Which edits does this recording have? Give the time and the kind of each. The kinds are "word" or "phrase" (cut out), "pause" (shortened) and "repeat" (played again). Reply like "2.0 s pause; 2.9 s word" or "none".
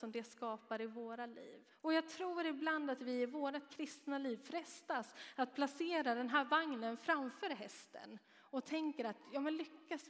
1.7 s pause